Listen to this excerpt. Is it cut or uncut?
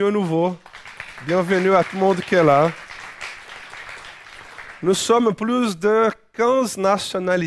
uncut